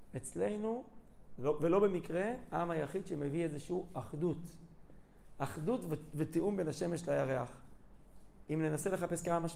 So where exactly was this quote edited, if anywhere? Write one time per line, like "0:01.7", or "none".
none